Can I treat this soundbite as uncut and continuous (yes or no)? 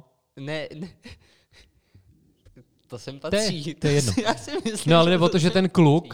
yes